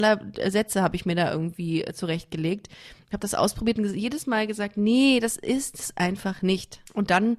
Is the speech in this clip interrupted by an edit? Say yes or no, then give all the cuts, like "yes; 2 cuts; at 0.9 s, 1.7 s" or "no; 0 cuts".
no; 0 cuts